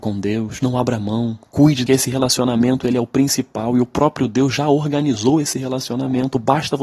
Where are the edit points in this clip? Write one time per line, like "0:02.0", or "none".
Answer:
0:01.9